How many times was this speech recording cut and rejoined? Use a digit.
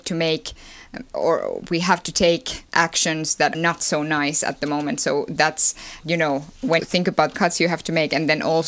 5